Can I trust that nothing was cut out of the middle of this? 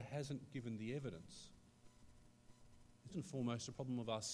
no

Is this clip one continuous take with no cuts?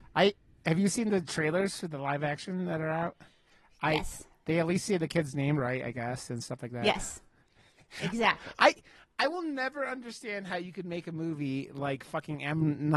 yes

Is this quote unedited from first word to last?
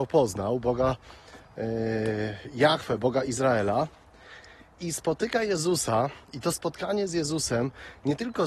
yes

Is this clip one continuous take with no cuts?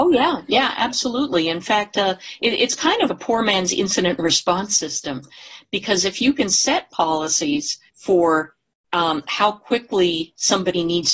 no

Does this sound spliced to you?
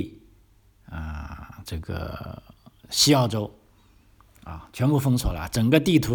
no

